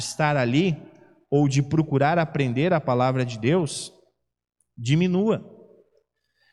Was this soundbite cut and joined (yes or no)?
no